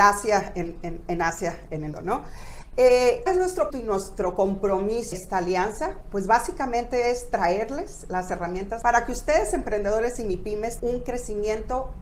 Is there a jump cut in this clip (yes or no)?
yes